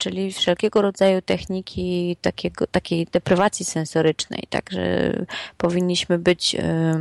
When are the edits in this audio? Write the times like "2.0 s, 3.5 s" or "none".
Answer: none